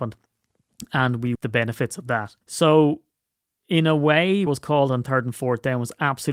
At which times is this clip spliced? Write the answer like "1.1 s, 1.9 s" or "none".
1.3 s, 2.4 s, 4.5 s